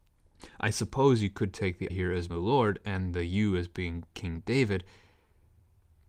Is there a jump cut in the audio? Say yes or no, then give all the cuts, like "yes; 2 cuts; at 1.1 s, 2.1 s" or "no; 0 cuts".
yes; 2 cuts; at 1.9 s, 2.3 s